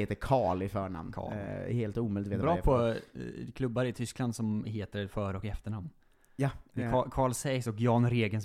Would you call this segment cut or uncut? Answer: uncut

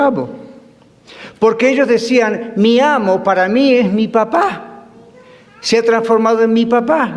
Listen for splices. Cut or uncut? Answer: uncut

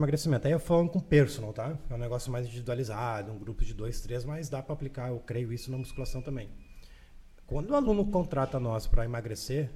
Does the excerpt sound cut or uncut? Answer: uncut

